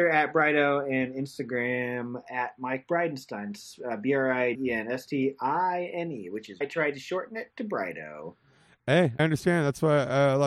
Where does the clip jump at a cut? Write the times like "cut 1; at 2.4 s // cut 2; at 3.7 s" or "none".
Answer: cut 1; at 2.2 s // cut 2; at 4.5 s // cut 3; at 6.6 s // cut 4; at 9.2 s